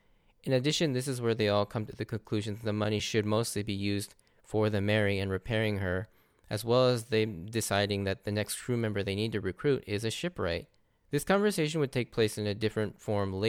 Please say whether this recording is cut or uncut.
uncut